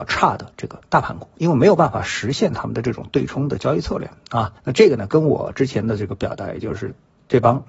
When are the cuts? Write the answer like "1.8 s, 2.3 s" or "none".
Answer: 4.6 s